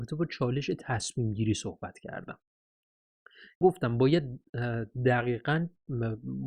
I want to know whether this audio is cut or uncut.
cut